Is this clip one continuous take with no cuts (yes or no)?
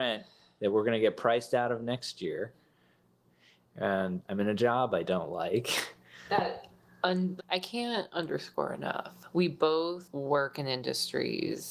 no